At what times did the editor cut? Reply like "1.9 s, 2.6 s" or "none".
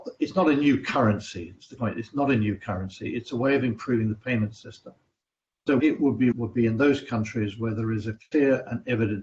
1.8 s, 5.8 s, 6.3 s